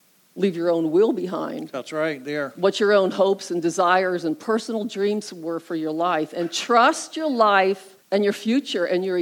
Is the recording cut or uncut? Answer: cut